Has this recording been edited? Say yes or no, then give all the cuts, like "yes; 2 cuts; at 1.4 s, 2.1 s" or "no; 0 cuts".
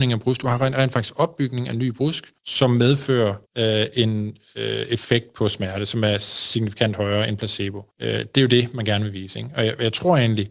yes; 3 cuts; at 2.4 s, 3.5 s, 7.9 s